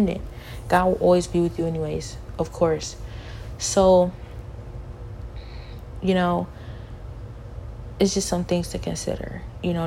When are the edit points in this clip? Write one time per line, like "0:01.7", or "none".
none